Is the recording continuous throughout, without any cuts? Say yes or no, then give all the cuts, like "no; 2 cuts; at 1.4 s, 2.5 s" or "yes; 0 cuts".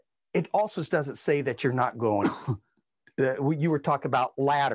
yes; 0 cuts